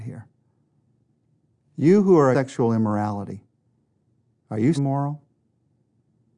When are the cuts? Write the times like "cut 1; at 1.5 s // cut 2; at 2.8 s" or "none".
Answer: cut 1; at 2.3 s // cut 2; at 4.8 s